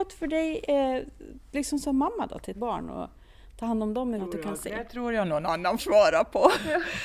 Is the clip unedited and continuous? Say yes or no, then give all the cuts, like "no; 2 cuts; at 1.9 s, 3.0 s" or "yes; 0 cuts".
no; 3 cuts; at 2.5 s, 4.2 s, 5.8 s